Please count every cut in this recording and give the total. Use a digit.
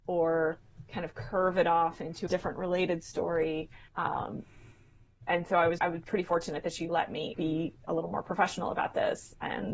5